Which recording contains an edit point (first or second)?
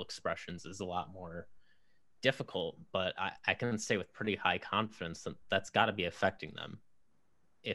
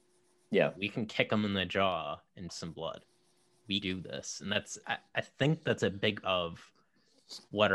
second